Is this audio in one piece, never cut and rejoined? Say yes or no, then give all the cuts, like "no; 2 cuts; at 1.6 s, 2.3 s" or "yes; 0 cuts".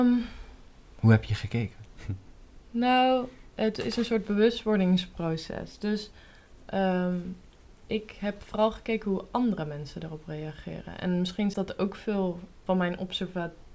no; 2 cuts; at 11.5 s, 12.7 s